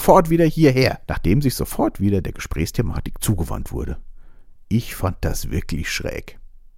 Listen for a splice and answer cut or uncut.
cut